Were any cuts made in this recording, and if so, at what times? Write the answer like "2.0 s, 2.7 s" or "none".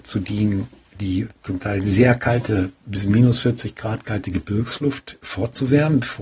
1.3 s